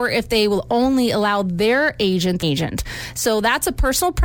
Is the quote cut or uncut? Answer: cut